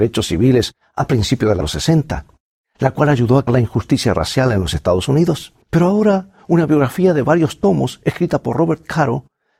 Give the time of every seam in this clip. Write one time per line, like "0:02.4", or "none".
0:01.6
0:03.5
0:05.6